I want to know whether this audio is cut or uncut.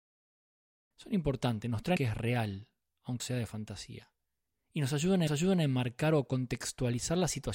cut